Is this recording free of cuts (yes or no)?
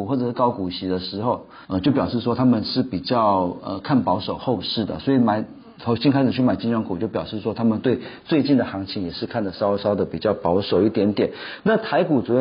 no